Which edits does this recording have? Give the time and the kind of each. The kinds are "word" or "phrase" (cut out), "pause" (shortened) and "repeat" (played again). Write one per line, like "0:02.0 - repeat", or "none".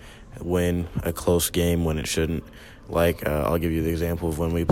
none